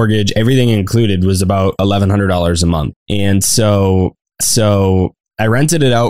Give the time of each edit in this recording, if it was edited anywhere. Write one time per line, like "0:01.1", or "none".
0:04.4